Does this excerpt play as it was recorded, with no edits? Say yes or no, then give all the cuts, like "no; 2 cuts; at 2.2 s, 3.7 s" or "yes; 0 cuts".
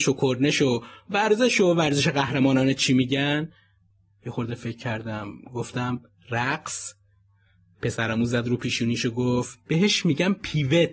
yes; 0 cuts